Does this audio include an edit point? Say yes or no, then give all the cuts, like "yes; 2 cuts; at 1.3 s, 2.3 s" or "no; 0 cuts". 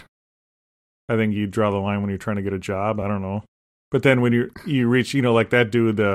no; 0 cuts